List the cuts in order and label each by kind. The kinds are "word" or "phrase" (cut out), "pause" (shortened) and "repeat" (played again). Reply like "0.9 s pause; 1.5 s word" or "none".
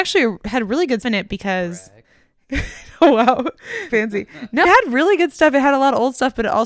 1.0 s word; 2.0 s pause; 3.9 s word; 4.6 s word

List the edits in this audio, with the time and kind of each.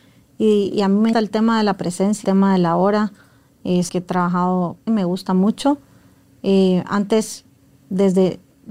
1.1 s word; 2.2 s word; 3.9 s word; 4.9 s word

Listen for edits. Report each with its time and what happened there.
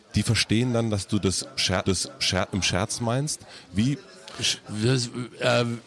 1.8 s repeat

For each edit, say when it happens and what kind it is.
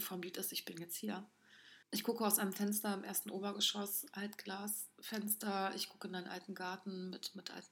1.8 s pause

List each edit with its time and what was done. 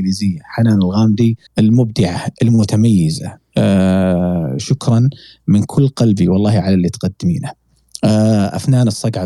1.5 s pause

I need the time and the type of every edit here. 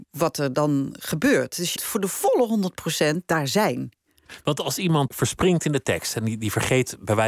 1.8 s word; 5.1 s word

